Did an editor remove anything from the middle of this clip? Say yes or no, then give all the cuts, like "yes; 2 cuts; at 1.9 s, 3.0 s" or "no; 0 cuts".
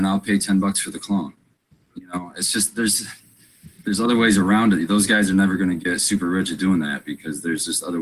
no; 0 cuts